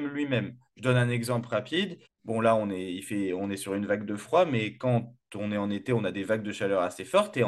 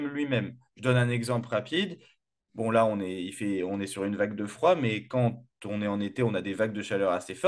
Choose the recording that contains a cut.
first; 1 cut; at 2.1 s

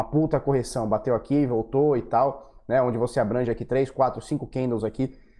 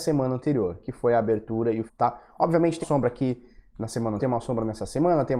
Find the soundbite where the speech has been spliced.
second; 3 cuts; at 1.9 s, 2.8 s, 4.2 s

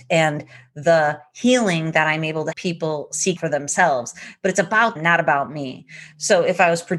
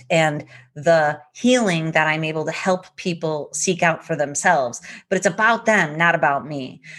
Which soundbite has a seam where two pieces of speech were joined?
first; 3 cuts; at 2.5 s, 3.4 s, 5.0 s

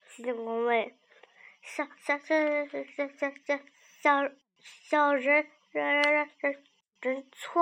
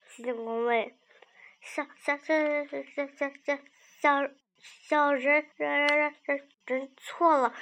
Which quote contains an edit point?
second; 2 cuts; at 5.5 s, 6.5 s

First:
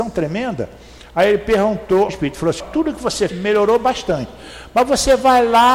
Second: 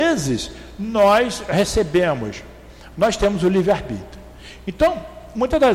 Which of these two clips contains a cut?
first; 3 cuts; at 2.1 s, 2.6 s, 3.3 s

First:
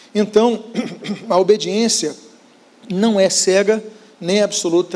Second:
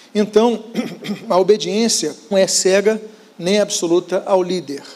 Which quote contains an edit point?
second; 1 cut; at 2.3 s

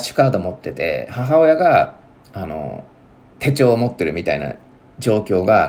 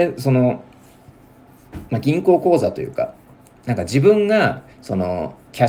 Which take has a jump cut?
second; 2 cuts; at 3.3 s, 4.7 s

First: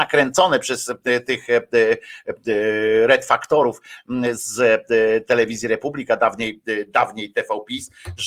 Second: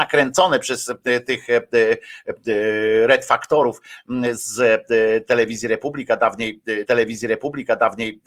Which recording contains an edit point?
second; 1 cut; at 6.9 s

